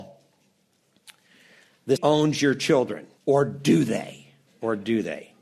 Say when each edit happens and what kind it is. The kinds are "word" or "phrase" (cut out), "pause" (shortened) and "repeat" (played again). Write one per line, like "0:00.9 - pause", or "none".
0:02.0 - word
0:03.2 - pause
0:04.5 - pause